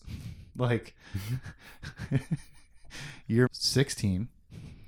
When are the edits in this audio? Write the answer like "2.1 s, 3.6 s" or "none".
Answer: 3.5 s